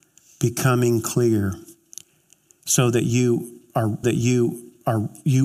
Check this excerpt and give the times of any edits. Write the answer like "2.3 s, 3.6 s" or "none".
4.0 s